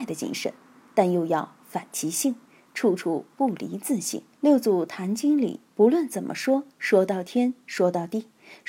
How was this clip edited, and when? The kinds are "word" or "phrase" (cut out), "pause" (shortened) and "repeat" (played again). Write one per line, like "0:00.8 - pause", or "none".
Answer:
0:04.3 - pause
0:05.7 - pause
0:06.7 - pause